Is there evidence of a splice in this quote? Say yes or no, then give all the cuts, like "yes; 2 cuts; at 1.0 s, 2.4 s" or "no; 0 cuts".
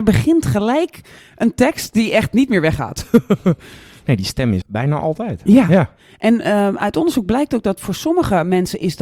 yes; 1 cut; at 4.6 s